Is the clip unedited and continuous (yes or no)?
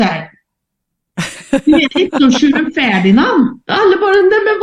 no